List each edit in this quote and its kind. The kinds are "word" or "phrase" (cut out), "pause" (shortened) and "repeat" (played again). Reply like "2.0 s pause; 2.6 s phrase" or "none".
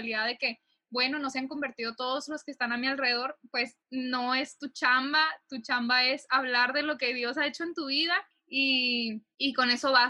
3.8 s pause; 8.3 s pause